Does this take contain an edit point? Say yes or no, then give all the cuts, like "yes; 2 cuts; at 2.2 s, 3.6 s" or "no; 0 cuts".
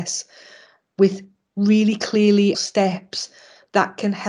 yes; 1 cut; at 2.5 s